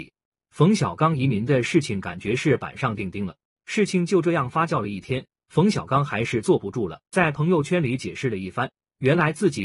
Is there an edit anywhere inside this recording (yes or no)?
yes